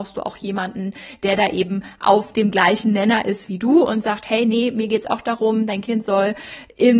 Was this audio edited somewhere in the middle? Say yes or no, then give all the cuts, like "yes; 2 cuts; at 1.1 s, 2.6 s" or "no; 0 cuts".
no; 0 cuts